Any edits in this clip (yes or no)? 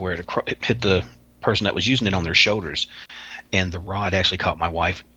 no